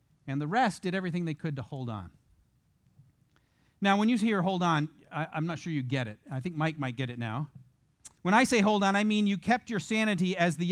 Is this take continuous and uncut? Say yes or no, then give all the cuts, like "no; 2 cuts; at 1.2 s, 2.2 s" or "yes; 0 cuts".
no; 1 cut; at 8.2 s